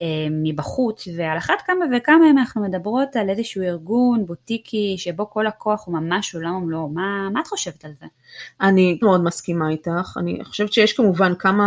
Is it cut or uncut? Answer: cut